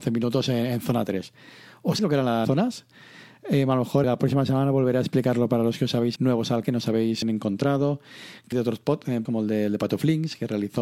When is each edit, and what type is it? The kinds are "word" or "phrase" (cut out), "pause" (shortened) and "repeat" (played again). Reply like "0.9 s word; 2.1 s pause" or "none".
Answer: 2.0 s word; 2.4 s word; 4.0 s word; 6.2 s word; 6.6 s word; 7.2 s word; 8.5 s word; 9.2 s word